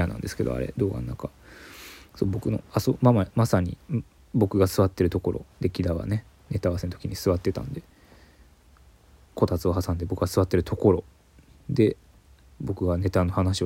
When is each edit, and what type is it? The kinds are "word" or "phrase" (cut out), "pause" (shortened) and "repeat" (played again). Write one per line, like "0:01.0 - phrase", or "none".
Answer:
0:05.5 - pause